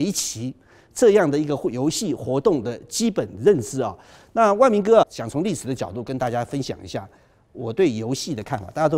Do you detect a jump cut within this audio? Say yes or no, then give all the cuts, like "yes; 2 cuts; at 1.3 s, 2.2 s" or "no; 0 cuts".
yes; 1 cut; at 5.0 s